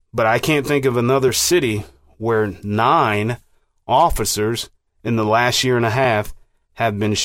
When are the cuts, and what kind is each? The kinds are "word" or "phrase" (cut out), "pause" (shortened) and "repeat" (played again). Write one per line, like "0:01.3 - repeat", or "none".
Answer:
none